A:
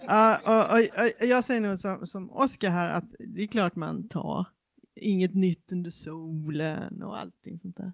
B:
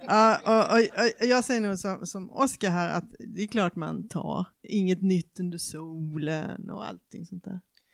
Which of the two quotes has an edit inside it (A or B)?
B